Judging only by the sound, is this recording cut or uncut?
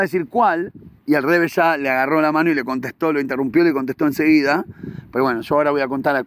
cut